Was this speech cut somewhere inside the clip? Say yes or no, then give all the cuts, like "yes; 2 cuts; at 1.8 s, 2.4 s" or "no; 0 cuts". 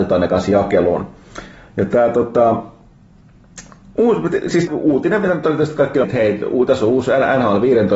yes; 2 cuts; at 4.7 s, 6.0 s